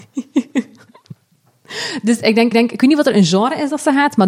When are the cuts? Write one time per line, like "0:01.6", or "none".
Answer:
0:02.5